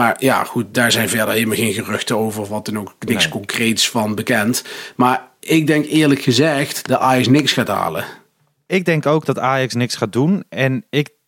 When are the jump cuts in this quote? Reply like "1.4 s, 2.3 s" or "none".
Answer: none